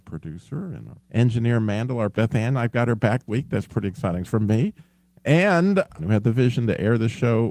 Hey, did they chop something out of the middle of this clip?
yes; 5 cuts; at 1.0 s, 2.1 s, 3.3 s, 4.2 s, 6.0 s

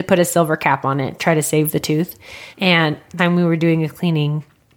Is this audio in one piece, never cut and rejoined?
no; 3 cuts; at 1.2 s, 2.5 s, 3.2 s

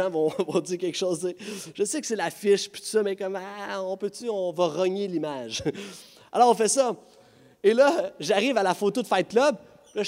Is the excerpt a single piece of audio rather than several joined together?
yes; 0 cuts

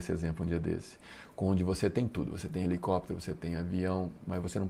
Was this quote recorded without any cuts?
yes; 0 cuts

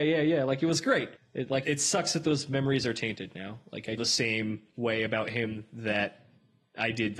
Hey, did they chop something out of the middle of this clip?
yes; 3 cuts; at 1.2 s, 1.6 s, 4.0 s

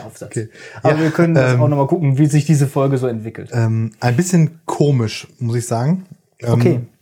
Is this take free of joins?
yes; 0 cuts

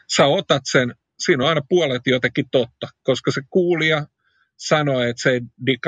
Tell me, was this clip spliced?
no; 0 cuts

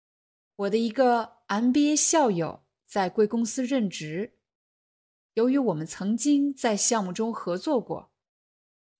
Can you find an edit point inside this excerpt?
no; 0 cuts

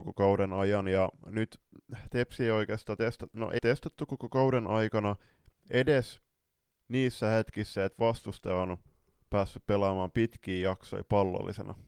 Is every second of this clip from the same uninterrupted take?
no; 1 cut; at 3.6 s

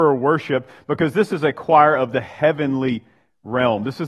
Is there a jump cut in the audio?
no; 0 cuts

